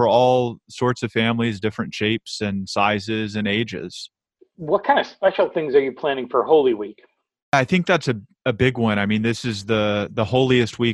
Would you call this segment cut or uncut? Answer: uncut